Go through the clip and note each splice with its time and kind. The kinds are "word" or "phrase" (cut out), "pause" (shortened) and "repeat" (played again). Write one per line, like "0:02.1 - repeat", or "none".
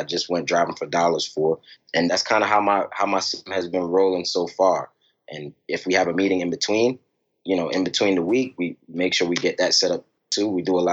none

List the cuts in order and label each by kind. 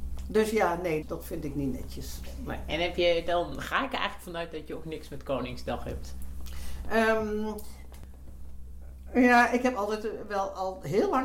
0:01.0 - word

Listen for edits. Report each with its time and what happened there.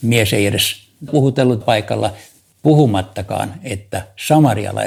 0:01.1 - word
0:01.6 - word

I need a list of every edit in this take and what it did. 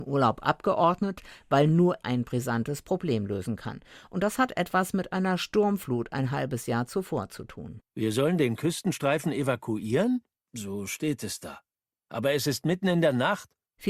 0:02.0 - word

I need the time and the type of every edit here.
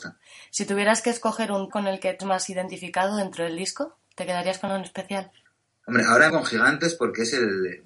0:01.7 - word
0:02.2 - word
0:04.7 - word
0:05.5 - pause
0:06.3 - word

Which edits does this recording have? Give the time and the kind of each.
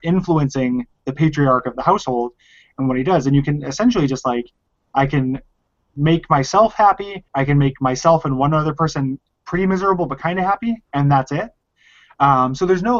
0:01.7 - word
0:07.3 - pause
0:10.8 - pause

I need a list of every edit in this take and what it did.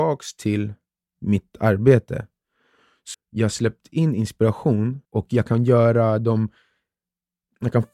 0:03.1 - word
0:05.0 - pause

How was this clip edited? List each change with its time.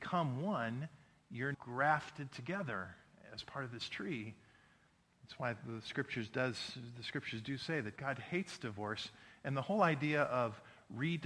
0:01.5 - word
0:08.0 - word

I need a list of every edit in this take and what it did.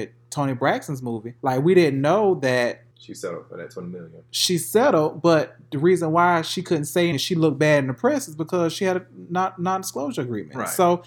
0:01.4 - pause
0:02.9 - pause
0:07.1 - word

